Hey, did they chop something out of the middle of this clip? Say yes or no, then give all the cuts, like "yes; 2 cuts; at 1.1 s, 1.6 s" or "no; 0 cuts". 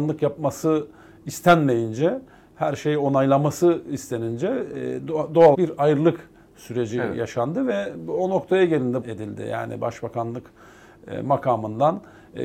yes; 2 cuts; at 5.5 s, 9.0 s